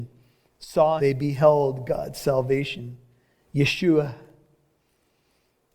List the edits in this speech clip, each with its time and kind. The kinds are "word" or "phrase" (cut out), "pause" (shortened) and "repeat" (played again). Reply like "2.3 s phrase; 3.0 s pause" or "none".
1.0 s word